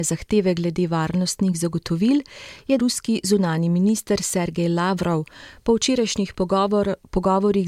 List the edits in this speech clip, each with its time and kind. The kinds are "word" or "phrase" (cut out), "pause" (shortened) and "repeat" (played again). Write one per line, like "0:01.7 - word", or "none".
0:02.8 - word